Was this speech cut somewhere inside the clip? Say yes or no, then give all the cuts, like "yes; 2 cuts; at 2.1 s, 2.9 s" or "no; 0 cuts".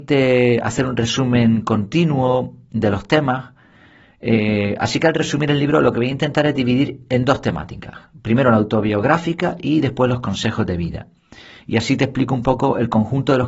no; 0 cuts